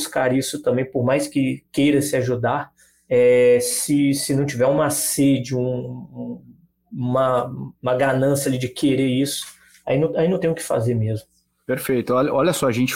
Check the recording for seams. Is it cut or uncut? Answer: cut